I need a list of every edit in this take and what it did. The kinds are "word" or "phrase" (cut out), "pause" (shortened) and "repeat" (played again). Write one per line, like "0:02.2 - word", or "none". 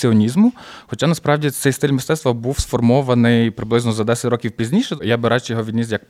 none